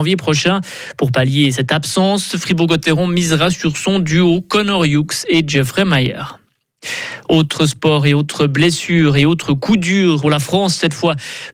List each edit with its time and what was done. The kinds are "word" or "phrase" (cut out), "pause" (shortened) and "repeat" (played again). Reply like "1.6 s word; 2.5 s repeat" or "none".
10.2 s phrase